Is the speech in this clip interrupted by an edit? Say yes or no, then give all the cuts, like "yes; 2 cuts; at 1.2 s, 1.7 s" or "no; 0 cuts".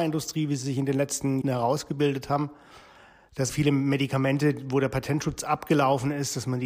yes; 2 cuts; at 1.4 s, 3.5 s